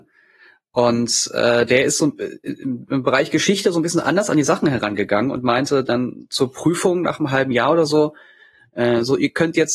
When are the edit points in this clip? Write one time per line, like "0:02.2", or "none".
none